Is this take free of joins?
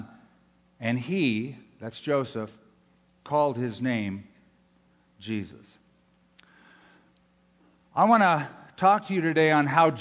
yes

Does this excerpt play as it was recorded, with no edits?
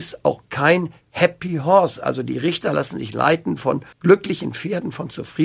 no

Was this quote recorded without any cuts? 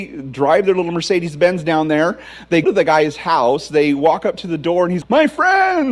no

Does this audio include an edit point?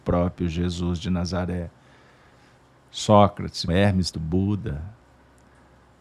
yes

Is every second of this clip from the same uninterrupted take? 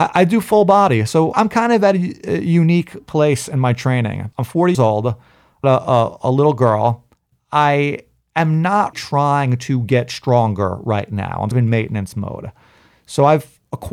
no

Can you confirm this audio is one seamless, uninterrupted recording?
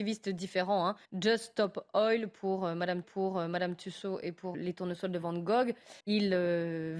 no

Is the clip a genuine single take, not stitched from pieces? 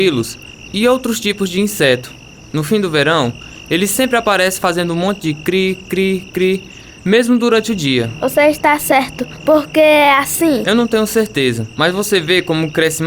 yes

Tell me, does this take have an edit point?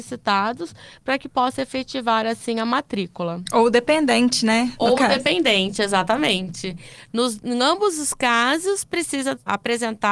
no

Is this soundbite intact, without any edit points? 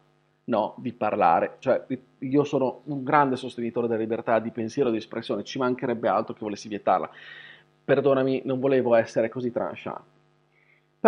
yes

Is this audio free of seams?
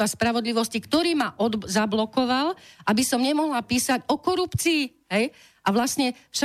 yes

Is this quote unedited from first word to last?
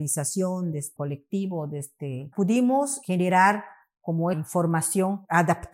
no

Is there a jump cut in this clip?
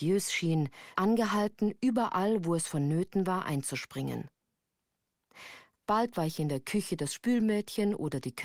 yes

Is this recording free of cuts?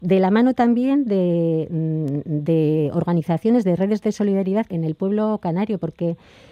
no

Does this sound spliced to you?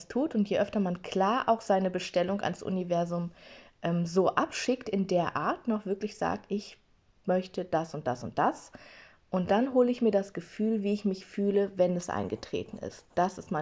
no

